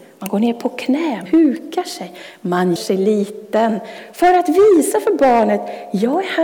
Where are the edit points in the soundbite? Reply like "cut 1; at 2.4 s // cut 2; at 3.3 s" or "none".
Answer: cut 1; at 1.3 s // cut 2; at 2.8 s